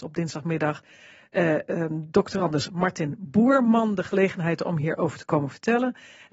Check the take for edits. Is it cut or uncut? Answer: uncut